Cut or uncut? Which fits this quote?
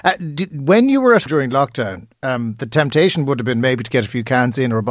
cut